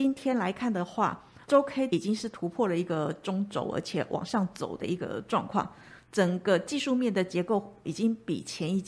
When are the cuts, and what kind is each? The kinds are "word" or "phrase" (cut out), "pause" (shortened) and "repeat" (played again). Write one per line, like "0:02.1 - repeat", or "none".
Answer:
0:01.4 - pause
0:01.9 - word
0:07.8 - word

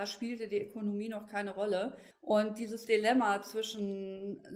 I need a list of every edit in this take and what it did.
0:02.1 - pause

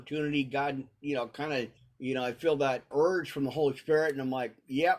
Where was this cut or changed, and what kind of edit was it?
0:01.8 - pause
0:02.9 - word

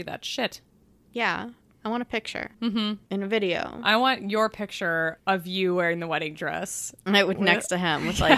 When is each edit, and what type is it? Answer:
0:02.5 - pause
0:05.2 - pause

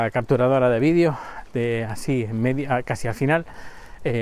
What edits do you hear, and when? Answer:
none

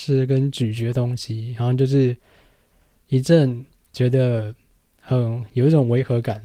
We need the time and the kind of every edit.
none

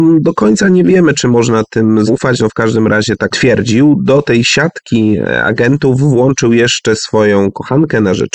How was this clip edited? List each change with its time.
0:02.1 - word
0:03.3 - phrase

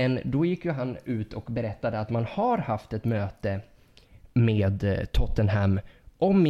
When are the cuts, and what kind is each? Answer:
none

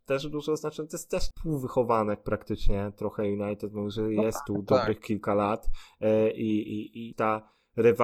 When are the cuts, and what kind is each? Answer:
0:01.3 - word
0:07.1 - phrase

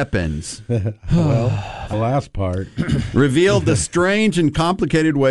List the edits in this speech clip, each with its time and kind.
0:01.9 - phrase

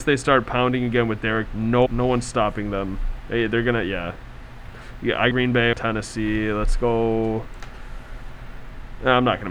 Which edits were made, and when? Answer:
0:01.5 - word
0:01.9 - word
0:05.3 - word
0:05.7 - word

